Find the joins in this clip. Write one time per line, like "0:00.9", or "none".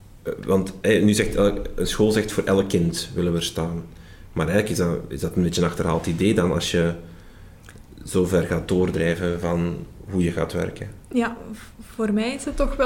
none